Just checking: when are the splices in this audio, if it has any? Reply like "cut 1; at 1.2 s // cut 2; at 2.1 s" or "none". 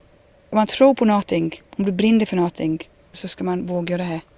cut 1; at 1.7 s